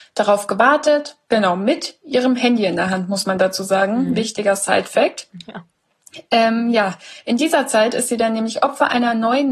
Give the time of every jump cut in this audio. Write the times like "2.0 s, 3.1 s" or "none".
1.2 s

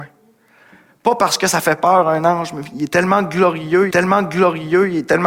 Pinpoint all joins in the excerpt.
3.9 s

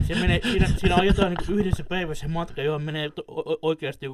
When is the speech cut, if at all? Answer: none

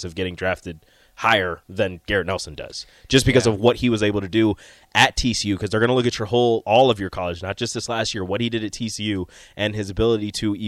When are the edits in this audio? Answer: none

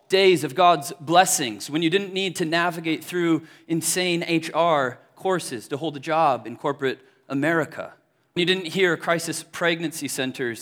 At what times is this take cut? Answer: 8.4 s

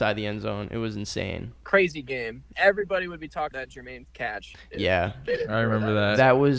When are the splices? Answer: 2.5 s, 3.5 s, 4.0 s

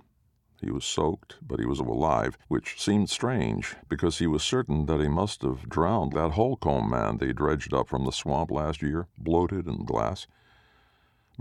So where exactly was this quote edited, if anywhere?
1.8 s, 2.4 s, 3.8 s, 6.1 s, 9.1 s, 9.8 s

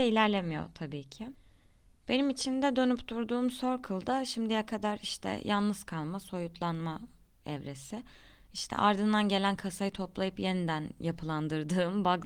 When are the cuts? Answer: none

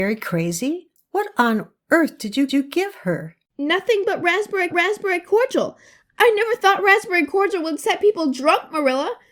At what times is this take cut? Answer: 1.0 s, 2.5 s, 3.5 s, 4.7 s

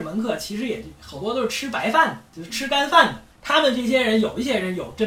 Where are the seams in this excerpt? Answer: 2.3 s, 3.3 s

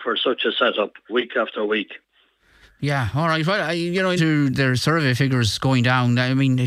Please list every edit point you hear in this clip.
1.1 s, 4.2 s, 4.5 s

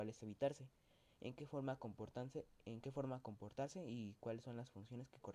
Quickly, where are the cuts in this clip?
none

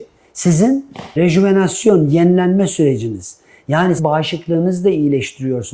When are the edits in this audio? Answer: 1.2 s, 4.0 s

